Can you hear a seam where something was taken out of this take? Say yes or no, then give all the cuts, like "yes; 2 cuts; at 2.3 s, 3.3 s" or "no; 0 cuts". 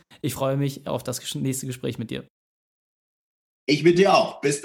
no; 0 cuts